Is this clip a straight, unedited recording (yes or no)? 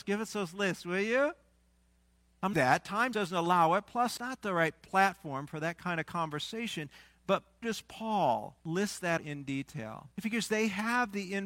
no